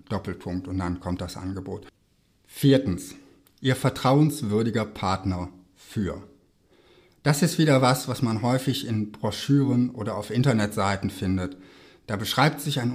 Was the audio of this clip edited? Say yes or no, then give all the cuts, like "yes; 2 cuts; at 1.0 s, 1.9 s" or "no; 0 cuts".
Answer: no; 0 cuts